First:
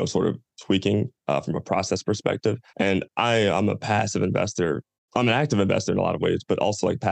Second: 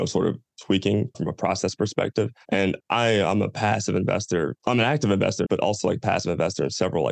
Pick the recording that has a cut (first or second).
second